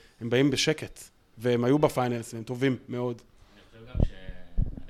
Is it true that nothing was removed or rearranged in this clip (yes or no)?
yes